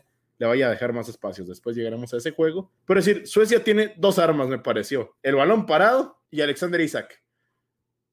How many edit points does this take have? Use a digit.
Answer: 3